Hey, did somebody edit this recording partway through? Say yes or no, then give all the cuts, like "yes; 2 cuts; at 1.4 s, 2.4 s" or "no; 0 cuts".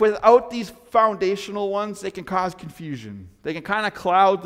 no; 0 cuts